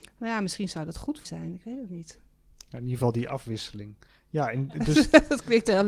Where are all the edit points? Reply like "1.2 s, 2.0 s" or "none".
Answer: 1.2 s

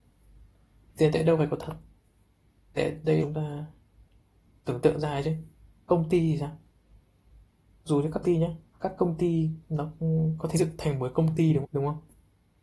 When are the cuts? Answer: 2.8 s, 3.2 s, 5.9 s, 7.9 s, 8.2 s, 8.7 s, 10.5 s, 11.6 s

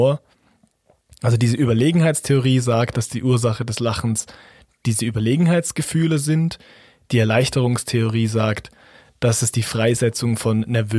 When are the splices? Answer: none

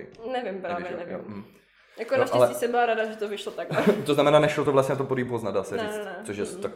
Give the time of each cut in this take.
none

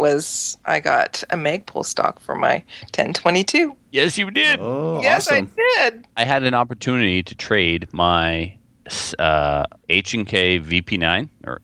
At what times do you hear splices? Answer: 9.8 s

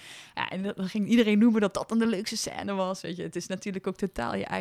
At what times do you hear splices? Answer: none

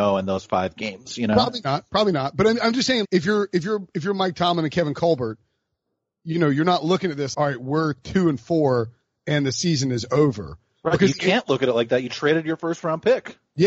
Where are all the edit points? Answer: 3.0 s, 7.3 s

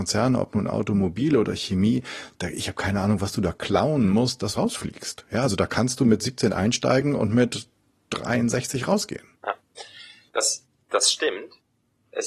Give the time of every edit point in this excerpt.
4.5 s, 9.4 s

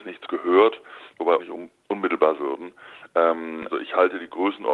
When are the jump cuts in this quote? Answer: 1.4 s, 2.4 s, 3.7 s

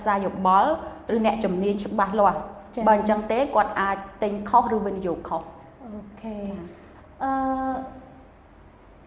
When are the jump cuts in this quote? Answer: none

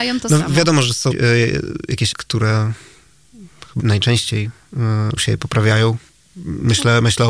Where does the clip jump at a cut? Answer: 1.1 s, 2.1 s, 3.8 s, 5.2 s

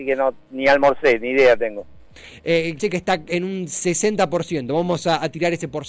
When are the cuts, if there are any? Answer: 2.8 s

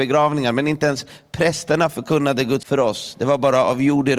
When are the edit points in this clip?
2.6 s

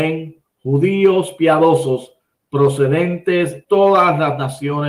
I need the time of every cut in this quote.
3.6 s

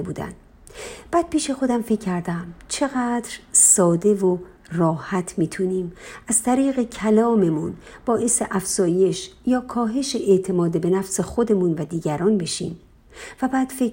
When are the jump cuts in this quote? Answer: none

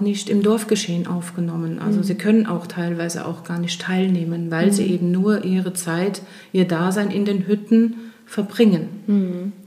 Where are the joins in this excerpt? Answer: none

